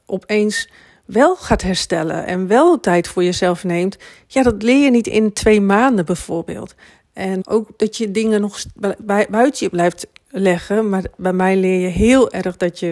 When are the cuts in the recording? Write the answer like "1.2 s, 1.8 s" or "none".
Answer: 7.4 s